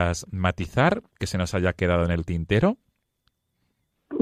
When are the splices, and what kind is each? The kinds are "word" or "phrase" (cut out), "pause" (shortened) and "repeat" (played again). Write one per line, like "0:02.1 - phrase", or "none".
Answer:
none